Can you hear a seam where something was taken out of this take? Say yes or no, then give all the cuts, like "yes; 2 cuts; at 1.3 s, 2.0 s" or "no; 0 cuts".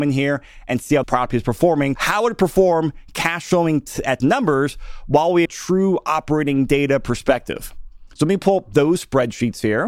yes; 4 cuts; at 1.0 s, 2.0 s, 4.2 s, 5.5 s